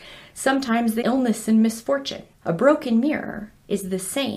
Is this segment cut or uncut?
cut